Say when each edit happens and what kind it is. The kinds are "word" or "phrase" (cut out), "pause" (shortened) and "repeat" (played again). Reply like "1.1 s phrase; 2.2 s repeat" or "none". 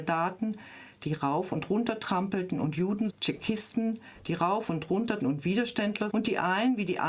3.1 s word; 5.2 s word; 6.1 s word